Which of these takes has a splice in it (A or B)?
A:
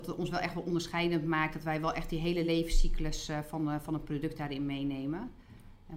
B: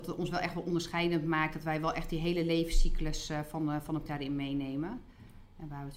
B